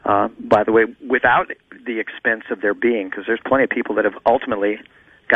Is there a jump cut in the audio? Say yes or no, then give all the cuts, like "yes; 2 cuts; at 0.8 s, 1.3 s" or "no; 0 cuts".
no; 0 cuts